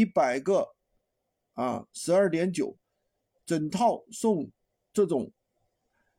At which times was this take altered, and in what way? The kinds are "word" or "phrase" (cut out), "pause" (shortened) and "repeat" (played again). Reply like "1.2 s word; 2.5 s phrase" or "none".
4.7 s pause